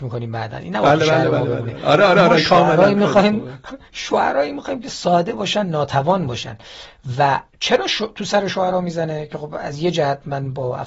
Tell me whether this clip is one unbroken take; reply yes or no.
no